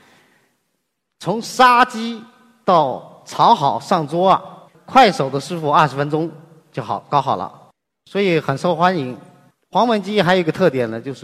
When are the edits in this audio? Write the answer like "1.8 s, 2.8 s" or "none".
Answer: 4.7 s